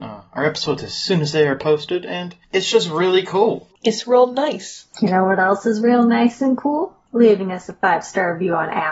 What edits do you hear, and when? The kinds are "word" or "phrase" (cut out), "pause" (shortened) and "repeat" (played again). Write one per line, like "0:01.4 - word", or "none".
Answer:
0:04.9 - pause